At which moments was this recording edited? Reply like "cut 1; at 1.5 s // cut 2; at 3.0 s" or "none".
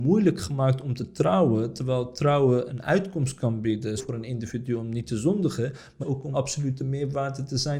cut 1; at 2.7 s // cut 2; at 4.0 s // cut 3; at 6.0 s // cut 4; at 6.3 s